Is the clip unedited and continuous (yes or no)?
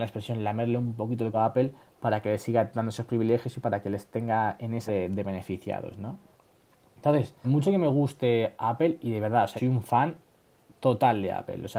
no